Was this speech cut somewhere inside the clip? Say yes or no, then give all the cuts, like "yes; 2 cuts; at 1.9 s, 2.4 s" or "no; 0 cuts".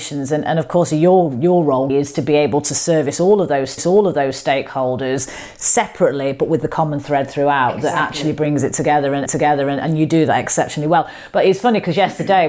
yes; 3 cuts; at 1.9 s, 3.8 s, 9.3 s